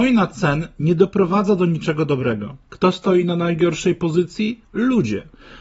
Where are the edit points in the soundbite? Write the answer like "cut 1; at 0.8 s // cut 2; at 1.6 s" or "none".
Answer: cut 1; at 2.6 s // cut 2; at 4.6 s